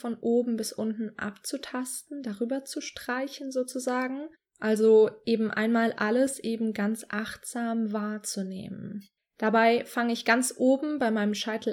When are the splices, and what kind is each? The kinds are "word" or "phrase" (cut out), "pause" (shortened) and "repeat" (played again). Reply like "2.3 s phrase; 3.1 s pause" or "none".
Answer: 4.4 s pause; 9.2 s pause

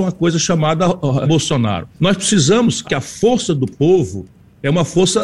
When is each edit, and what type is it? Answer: 1.2 s word; 1.9 s pause; 2.8 s word

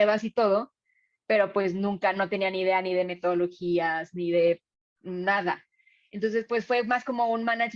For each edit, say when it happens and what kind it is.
none

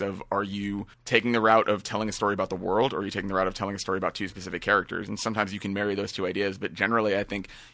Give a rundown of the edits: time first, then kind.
0.9 s pause

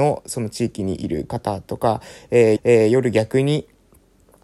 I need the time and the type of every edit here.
2.6 s repeat

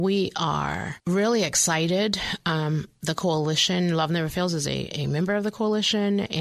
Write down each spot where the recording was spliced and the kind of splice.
none

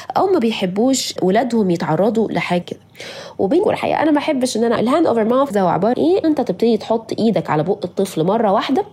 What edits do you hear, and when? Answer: 1.2 s word; 2.6 s word; 3.6 s word; 4.8 s word; 5.5 s word; 5.9 s word; 6.2 s word

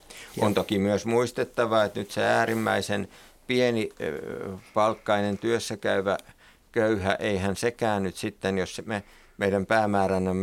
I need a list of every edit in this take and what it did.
none

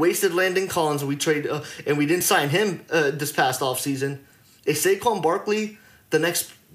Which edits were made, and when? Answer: none

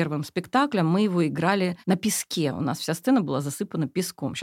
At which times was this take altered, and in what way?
1.8 s pause

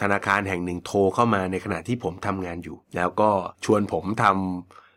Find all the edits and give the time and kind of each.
2.8 s pause; 3.5 s pause

